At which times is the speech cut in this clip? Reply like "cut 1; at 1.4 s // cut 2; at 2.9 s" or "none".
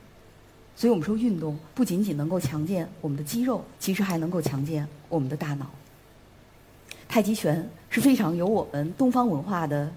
cut 1; at 1.7 s // cut 2; at 3.7 s // cut 3; at 7.0 s // cut 4; at 7.8 s